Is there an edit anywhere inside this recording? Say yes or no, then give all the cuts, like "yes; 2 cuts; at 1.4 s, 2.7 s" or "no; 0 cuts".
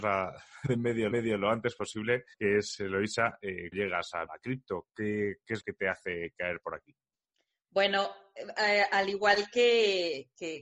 yes; 6 cuts; at 1.1 s, 2.3 s, 3.7 s, 4.3 s, 5.6 s, 7.1 s